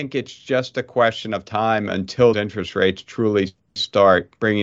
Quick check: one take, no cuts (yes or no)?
no